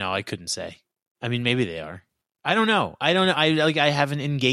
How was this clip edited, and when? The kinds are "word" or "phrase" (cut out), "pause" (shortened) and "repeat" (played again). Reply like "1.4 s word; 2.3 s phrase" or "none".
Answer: none